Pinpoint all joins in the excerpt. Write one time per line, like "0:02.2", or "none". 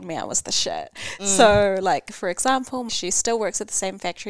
0:02.9